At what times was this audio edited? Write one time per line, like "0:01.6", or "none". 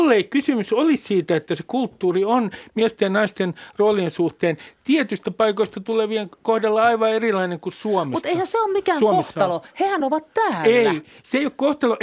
none